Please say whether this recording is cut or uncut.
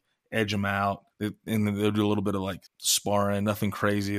cut